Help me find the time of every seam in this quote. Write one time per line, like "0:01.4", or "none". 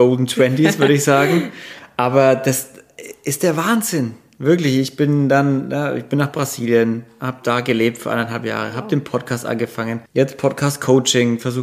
0:10.1

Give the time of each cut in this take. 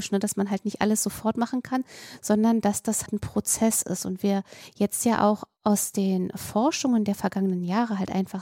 0:03.1

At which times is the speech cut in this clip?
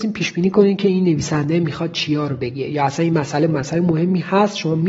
none

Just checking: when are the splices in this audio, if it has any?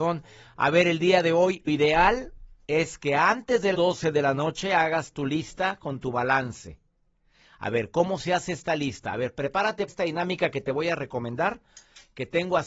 0:01.7
0:03.7
0:09.9

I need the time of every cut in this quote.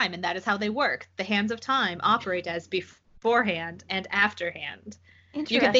none

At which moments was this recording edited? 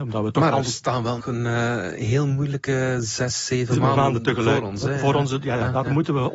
0:01.2

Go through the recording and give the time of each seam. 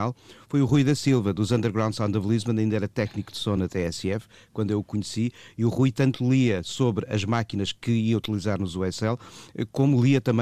none

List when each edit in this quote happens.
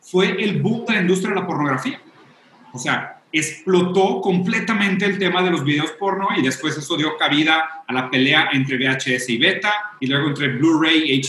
none

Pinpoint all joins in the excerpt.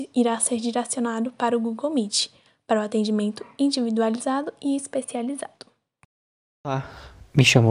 none

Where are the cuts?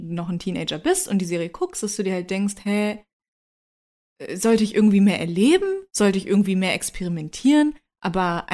none

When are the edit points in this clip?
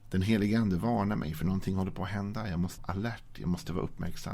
0:02.8

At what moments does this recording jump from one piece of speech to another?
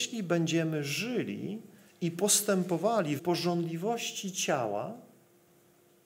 0:03.2

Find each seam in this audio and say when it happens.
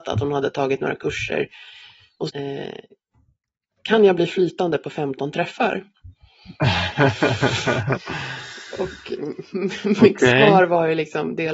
0:02.3
0:06.6

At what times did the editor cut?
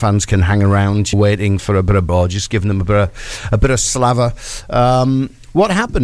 0:01.1
0:01.6
0:02.1

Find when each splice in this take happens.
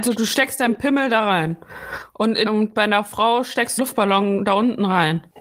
0:02.5
0:03.8

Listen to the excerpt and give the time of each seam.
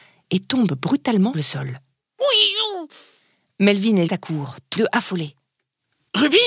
0:01.3
0:04.1
0:04.8

